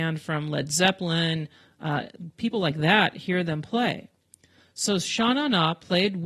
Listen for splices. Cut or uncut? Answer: uncut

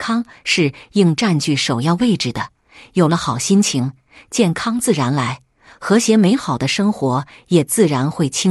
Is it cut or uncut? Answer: uncut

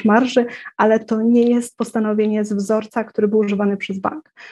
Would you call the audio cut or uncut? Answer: uncut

